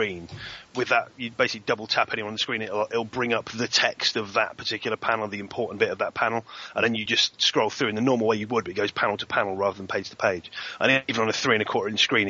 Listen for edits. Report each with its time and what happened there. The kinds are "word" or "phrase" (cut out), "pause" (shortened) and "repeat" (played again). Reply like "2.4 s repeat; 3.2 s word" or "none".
none